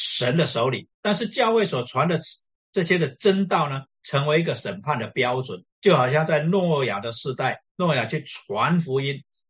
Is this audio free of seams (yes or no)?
no